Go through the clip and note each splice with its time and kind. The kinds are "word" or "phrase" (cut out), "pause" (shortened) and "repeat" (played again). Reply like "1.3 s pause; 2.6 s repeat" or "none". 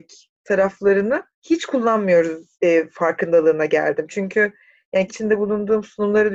1.3 s pause; 2.5 s pause; 5.1 s word